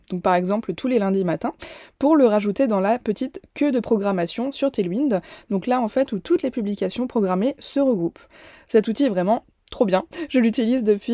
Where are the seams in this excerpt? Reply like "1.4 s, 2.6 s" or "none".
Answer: none